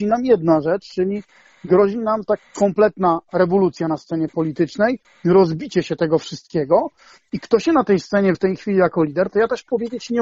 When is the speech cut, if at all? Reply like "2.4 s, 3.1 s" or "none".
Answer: 2.4 s, 8.3 s